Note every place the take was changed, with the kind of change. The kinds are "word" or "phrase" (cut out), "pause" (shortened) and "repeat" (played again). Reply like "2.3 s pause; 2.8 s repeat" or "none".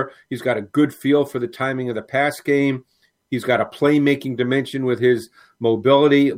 none

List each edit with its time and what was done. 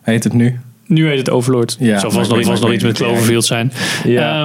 2.4 s repeat

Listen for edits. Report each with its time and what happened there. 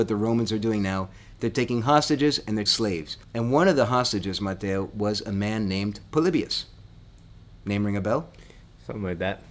2.7 s word; 3.2 s pause

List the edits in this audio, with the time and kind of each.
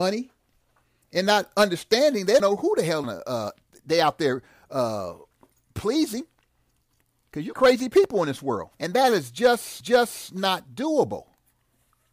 2.4 s word; 3.0 s phrase; 7.5 s phrase; 8.7 s pause; 9.8 s repeat

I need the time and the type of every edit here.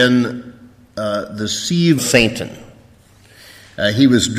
2.0 s word

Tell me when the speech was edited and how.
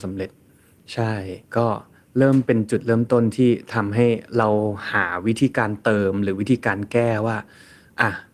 1.4 s pause

